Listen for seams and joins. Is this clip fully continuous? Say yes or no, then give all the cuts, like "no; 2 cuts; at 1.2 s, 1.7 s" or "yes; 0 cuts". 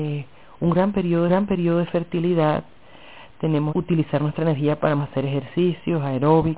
no; 3 cuts; at 1.3 s, 3.7 s, 5.0 s